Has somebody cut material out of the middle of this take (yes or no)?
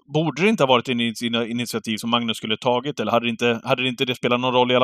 no